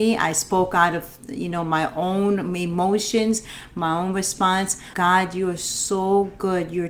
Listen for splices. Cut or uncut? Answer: cut